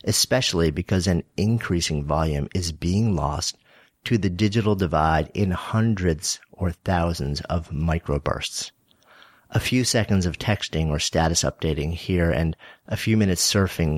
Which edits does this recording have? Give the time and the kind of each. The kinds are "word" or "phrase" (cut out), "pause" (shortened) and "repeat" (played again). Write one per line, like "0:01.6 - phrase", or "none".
none